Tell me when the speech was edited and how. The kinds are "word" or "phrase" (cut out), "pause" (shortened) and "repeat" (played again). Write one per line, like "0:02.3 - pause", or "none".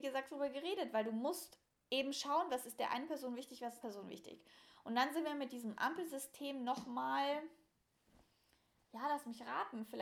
0:03.8 - phrase